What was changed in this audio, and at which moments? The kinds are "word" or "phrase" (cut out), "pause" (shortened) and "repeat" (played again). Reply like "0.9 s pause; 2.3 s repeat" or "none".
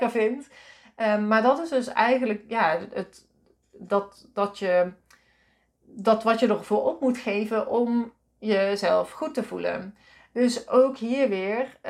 none